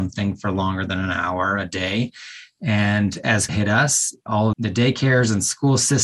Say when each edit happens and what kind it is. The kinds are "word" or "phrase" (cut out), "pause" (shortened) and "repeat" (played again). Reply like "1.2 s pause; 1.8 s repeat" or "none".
3.5 s word; 4.5 s word